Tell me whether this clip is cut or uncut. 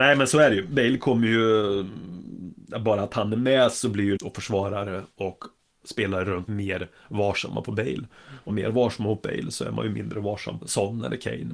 cut